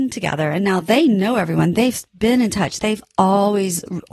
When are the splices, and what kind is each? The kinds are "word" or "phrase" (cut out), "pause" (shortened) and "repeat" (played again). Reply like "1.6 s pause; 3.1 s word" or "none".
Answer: none